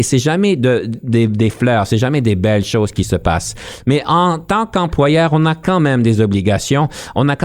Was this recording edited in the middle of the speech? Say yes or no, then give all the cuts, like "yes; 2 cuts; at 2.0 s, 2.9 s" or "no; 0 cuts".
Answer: no; 0 cuts